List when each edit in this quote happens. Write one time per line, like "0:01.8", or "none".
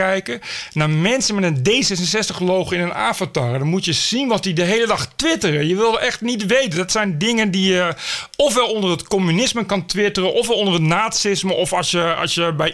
none